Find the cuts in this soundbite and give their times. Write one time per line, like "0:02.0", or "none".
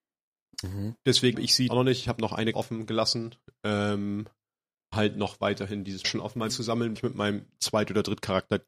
0:01.3
0:01.7
0:02.5
0:04.9
0:06.0
0:06.5
0:07.0